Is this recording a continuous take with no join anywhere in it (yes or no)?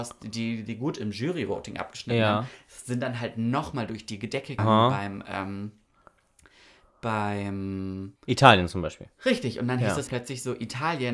no